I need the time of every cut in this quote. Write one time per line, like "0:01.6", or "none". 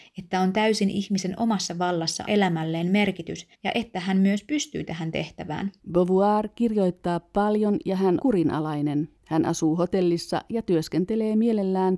0:02.3
0:03.5
0:05.8
0:08.2
0:09.2